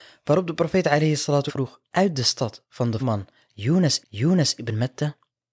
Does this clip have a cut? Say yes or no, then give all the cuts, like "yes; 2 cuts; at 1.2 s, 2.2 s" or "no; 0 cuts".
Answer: yes; 4 cuts; at 1.5 s, 1.9 s, 3.0 s, 4.0 s